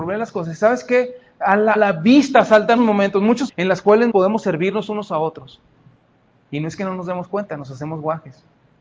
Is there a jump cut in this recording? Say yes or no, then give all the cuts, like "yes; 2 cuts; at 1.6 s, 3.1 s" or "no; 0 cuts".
yes; 4 cuts; at 1.8 s, 2.8 s, 3.5 s, 4.1 s